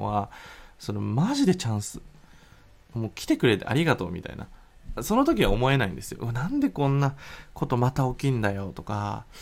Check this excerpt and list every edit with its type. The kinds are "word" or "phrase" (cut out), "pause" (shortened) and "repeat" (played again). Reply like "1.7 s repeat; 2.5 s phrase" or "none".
none